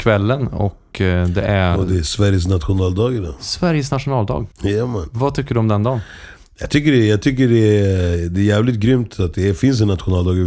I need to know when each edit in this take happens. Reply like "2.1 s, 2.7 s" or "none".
4.5 s